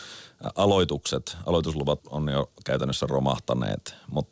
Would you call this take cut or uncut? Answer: cut